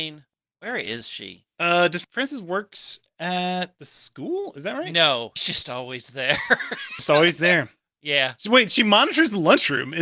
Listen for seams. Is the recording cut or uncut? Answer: cut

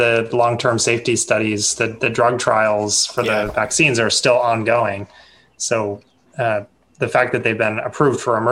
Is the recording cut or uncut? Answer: uncut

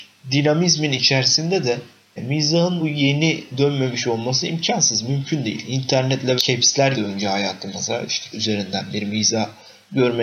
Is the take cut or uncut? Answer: cut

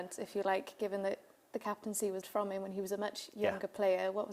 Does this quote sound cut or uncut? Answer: cut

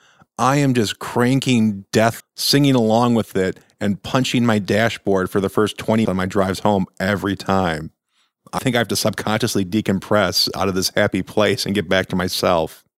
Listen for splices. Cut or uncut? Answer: cut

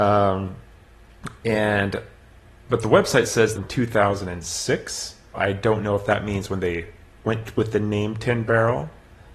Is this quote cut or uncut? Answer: cut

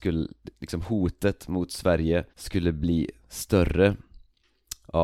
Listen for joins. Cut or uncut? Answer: cut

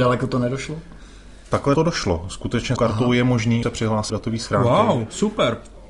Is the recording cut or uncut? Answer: cut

